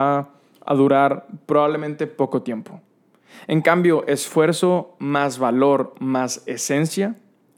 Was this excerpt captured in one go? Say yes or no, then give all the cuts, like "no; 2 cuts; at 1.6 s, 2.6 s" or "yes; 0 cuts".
yes; 0 cuts